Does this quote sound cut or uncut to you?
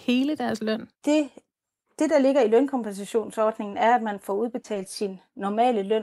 cut